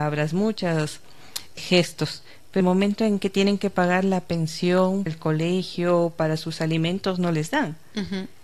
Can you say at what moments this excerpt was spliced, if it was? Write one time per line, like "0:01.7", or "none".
0:01.6
0:02.6
0:05.1